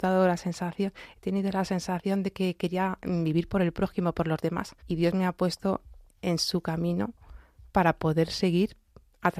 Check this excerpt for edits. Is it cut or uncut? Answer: cut